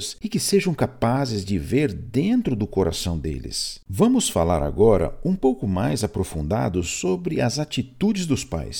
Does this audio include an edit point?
yes; 1 cut; at 3.8 s

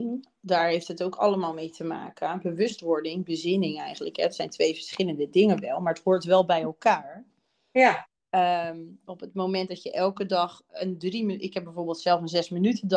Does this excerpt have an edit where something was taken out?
no; 0 cuts

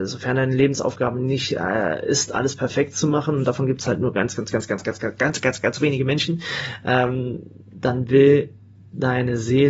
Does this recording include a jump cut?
no; 0 cuts

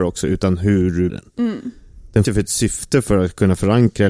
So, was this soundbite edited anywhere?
yes; 2 cuts; at 1.1 s, 2.2 s

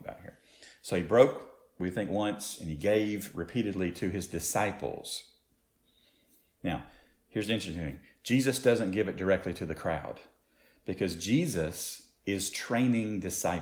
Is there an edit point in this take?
no; 0 cuts

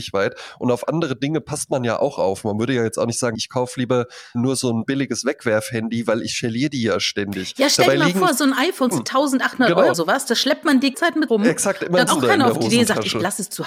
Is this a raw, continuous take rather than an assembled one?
no; 7 cuts; at 3.3 s, 4.3 s, 8.9 s, 9.9 s, 10.9 s, 11.3 s, 12.1 s

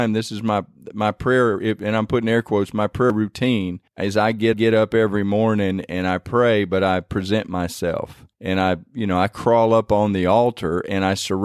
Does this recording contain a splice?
yes; 3 cuts; at 3.9 s, 4.5 s, 8.3 s

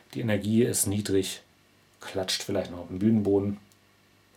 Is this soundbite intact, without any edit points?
yes; 0 cuts

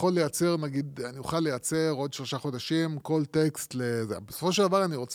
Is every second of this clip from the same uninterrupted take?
yes; 0 cuts

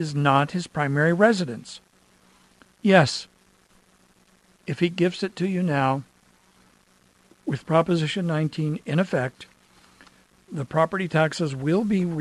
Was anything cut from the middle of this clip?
no; 0 cuts

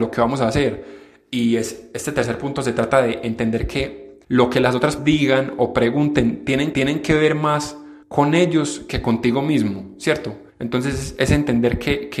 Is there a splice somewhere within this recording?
yes; 5 cuts; at 4.2 s, 5.0 s, 6.7 s, 8.0 s, 10.5 s

